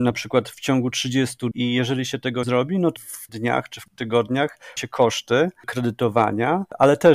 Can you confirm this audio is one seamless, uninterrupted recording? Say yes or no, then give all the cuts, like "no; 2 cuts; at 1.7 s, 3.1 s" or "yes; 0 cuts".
no; 6 cuts; at 1.5 s, 2.4 s, 3.0 s, 3.3 s, 3.9 s, 4.8 s